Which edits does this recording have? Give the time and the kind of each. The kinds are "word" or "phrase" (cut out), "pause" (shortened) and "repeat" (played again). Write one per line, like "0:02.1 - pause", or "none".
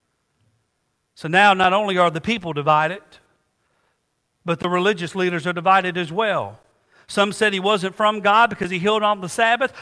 none